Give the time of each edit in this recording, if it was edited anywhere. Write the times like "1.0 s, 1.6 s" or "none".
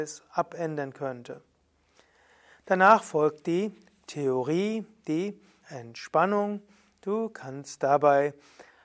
5.6 s